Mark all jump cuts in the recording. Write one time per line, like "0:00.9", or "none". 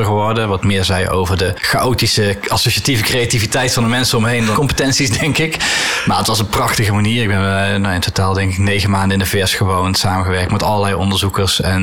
0:04.5